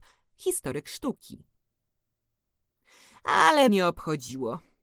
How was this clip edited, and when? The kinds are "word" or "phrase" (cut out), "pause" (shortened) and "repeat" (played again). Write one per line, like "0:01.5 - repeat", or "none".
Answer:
0:03.7 - phrase